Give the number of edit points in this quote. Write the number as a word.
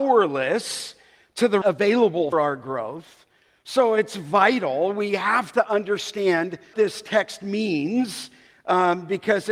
three